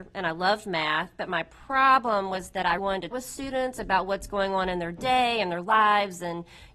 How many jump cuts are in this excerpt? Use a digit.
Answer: 2